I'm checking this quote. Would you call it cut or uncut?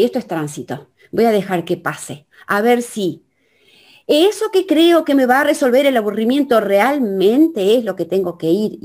uncut